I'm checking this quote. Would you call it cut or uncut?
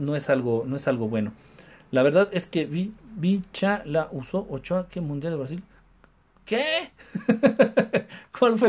uncut